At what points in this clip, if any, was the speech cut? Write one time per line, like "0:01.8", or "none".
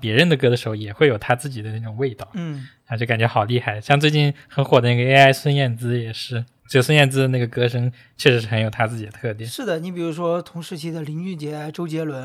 none